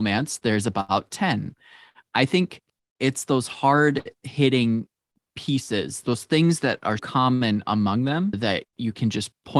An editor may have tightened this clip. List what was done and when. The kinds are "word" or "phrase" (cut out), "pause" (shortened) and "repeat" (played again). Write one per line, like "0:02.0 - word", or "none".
0:03.0 - word
0:07.0 - word